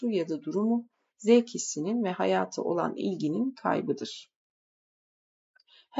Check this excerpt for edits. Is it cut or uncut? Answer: uncut